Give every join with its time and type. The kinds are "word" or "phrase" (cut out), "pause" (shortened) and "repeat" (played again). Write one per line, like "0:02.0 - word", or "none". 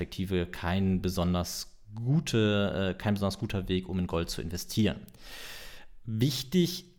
none